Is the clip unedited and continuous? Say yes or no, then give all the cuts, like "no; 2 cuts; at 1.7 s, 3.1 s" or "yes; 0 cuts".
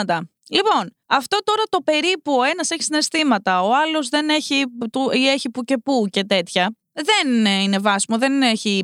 no; 1 cut; at 1.0 s